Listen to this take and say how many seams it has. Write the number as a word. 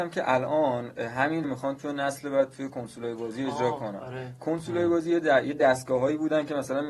one